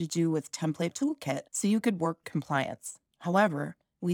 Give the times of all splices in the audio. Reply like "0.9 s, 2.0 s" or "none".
0.9 s, 1.5 s, 2.2 s